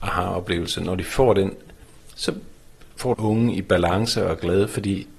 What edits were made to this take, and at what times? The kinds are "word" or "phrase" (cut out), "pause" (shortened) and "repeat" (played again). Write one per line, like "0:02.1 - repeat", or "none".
0:03.1 - phrase

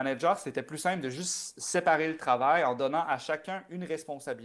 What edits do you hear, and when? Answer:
none

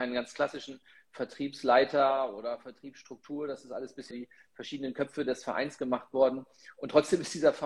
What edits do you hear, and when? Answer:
0:04.1 - word

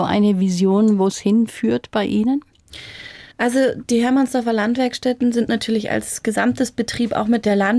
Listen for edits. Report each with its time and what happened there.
0:03.3 - pause

